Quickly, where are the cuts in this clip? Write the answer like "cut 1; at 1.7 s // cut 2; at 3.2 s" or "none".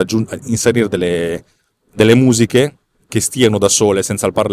none